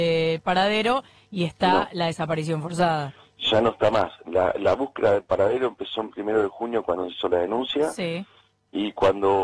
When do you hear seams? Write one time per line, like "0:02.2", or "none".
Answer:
none